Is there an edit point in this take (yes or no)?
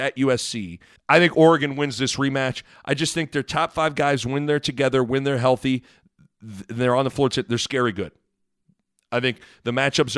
yes